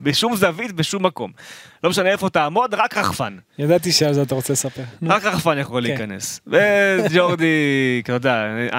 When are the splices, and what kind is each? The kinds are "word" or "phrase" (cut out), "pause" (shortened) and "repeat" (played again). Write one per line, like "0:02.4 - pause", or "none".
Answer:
none